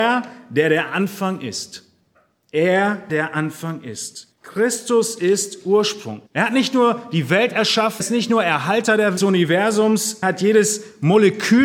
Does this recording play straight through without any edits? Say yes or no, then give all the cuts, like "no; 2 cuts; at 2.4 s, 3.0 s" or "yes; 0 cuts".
no; 6 cuts; at 3.1 s, 4.3 s, 6.3 s, 8.0 s, 9.2 s, 10.2 s